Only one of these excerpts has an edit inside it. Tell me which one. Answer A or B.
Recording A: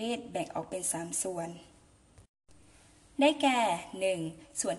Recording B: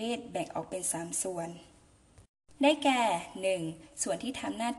B